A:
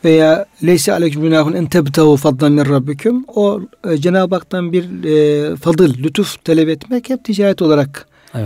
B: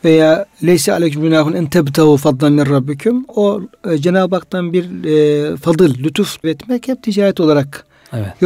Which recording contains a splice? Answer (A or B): B